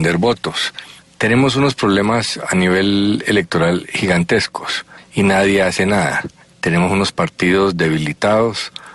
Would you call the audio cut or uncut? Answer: uncut